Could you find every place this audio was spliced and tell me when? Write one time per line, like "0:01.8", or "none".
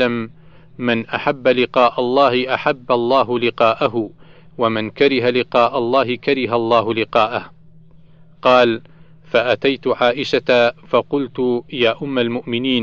none